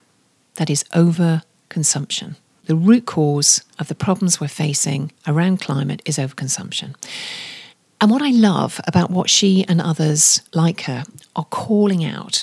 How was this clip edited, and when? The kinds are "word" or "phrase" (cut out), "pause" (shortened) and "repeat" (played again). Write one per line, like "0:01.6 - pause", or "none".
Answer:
0:02.5 - pause
0:03.7 - pause
0:05.2 - pause
0:07.7 - pause
0:10.5 - pause